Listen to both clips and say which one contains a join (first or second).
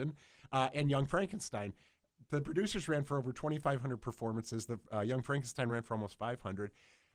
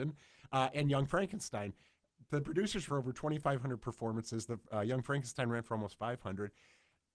second